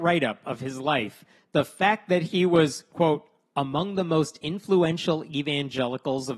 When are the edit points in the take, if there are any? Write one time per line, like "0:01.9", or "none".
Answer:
none